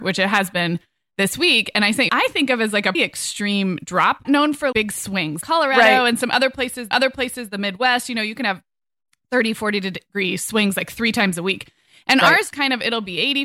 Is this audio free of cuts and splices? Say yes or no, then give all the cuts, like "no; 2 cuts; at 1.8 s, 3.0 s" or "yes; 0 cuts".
no; 7 cuts; at 2.1 s, 2.9 s, 4.2 s, 4.7 s, 5.4 s, 6.9 s, 12.5 s